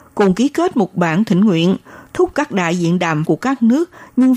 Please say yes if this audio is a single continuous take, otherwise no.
no